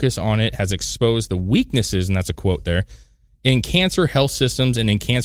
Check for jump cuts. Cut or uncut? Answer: uncut